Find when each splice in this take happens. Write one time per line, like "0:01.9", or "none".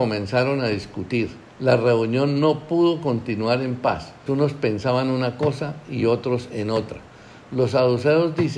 0:01.5
0:04.3